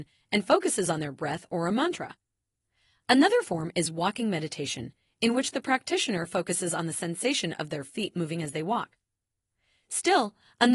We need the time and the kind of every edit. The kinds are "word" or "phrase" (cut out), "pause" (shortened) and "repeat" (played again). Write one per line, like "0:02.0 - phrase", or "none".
none